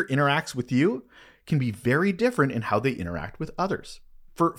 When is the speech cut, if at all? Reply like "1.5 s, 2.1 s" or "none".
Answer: none